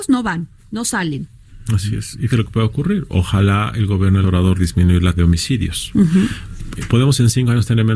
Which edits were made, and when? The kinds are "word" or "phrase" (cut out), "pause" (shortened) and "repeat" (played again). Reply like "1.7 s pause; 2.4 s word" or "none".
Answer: 2.3 s word; 4.2 s word; 4.6 s word; 5.1 s word